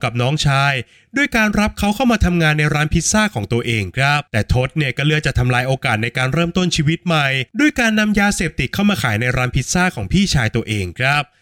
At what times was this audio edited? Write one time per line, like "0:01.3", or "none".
0:04.3
0:07.5